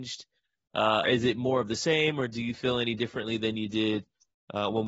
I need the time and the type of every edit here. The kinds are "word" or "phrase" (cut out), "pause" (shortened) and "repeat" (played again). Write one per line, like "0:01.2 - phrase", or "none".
0:01.0 - word